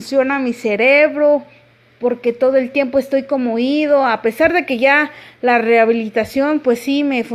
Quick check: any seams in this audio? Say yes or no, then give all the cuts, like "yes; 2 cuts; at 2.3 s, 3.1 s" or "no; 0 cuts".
no; 0 cuts